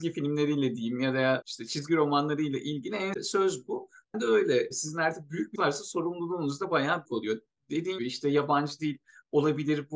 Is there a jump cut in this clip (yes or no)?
yes